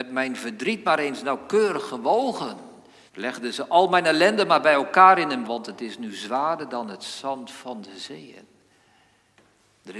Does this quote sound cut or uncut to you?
cut